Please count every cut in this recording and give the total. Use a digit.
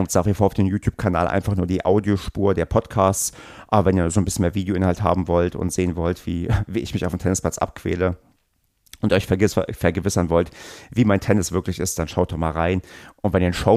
0